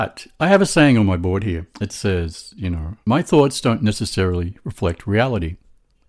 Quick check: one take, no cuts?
no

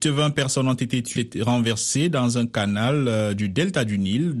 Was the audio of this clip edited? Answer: yes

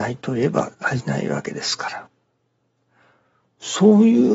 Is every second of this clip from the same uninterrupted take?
yes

